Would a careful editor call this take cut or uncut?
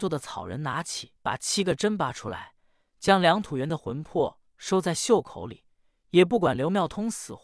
cut